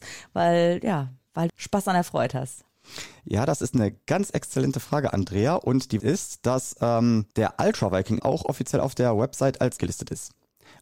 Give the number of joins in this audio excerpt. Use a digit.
5